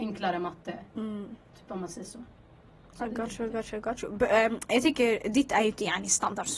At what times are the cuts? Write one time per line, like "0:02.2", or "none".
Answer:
none